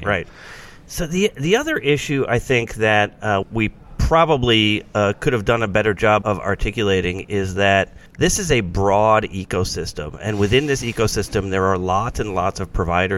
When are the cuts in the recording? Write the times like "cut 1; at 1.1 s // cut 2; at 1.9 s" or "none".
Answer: cut 1; at 3.4 s // cut 2; at 6.2 s // cut 3; at 8.1 s